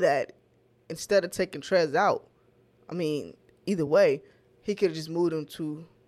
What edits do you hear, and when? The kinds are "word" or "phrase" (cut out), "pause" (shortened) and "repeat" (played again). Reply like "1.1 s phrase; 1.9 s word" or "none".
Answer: none